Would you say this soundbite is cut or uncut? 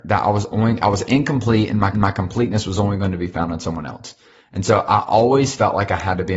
cut